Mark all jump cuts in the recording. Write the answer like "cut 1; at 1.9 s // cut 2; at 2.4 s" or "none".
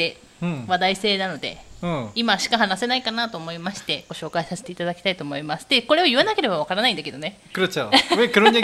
cut 1; at 7.5 s